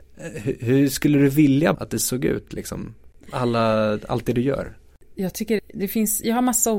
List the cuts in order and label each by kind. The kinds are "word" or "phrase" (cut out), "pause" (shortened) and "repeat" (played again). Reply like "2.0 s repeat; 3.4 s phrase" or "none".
1.7 s word; 5.6 s word